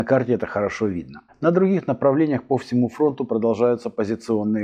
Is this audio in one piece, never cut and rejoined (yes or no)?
no